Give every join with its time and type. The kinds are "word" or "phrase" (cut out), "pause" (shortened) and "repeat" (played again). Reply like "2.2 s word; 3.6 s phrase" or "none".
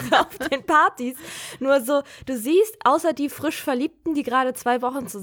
none